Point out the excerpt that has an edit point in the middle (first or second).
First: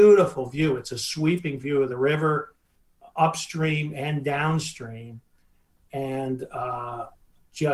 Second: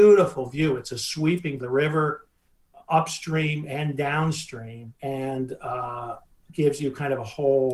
second